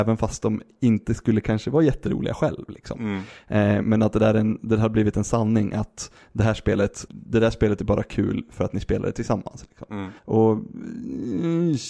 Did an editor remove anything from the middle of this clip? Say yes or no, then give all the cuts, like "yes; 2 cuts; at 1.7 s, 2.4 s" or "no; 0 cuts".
yes; 2 cuts; at 7.1 s, 10.2 s